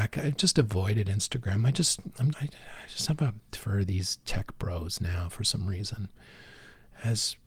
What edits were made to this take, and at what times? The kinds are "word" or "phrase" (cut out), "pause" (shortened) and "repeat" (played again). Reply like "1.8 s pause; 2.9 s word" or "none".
2.3 s word; 3.5 s word

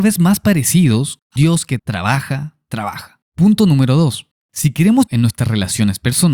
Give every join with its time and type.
1.4 s word; 1.8 s word; 3.3 s pause; 4.3 s pause; 5.1 s phrase

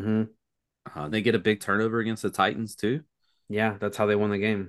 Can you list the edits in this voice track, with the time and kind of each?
1.1 s word

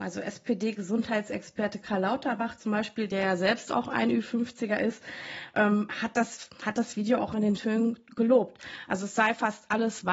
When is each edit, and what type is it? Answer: 7.6 s word

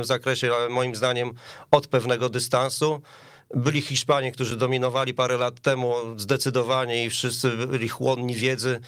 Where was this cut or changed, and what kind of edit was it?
none

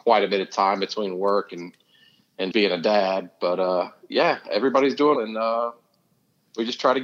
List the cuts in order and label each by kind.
2.5 s word; 5.2 s word

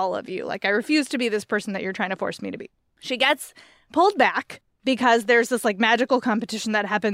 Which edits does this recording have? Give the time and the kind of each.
none

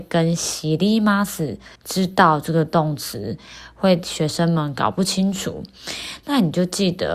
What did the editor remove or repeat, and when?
1.8 s pause

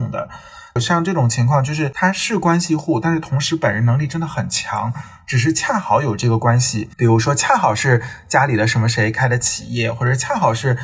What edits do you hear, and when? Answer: 6.9 s pause

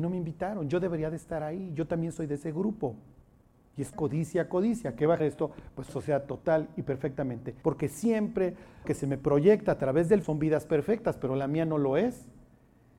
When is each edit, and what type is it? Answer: 3.9 s word; 5.2 s word; 5.9 s word; 7.6 s word; 8.8 s word; 10.2 s word

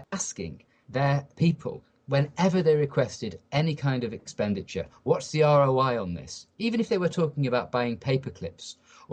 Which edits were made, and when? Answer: none

